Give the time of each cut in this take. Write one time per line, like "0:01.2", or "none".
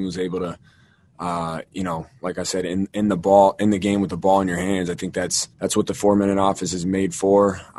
0:05.5

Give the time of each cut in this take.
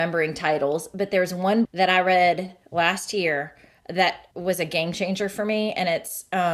0:01.6
0:04.3

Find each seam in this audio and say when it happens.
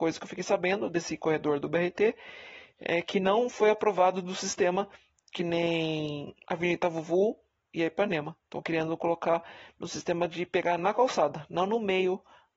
0:06.4

